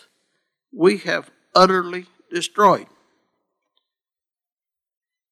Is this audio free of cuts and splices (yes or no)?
yes